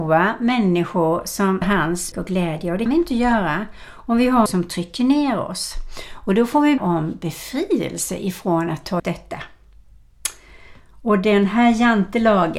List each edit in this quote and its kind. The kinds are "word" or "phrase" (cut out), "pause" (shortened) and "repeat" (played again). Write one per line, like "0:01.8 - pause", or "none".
0:01.6 - word
0:02.1 - word
0:02.9 - word
0:04.5 - word
0:06.8 - word
0:09.0 - word